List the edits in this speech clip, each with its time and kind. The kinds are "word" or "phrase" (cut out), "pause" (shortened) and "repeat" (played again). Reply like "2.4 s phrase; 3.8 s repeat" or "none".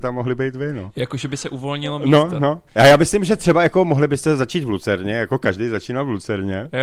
2.7 s pause